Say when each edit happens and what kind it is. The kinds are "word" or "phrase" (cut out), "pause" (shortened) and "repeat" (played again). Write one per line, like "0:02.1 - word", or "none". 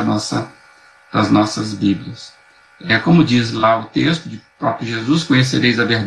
none